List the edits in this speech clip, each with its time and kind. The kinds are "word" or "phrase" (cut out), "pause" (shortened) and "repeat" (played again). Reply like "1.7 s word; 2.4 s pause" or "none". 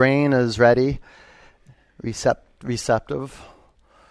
none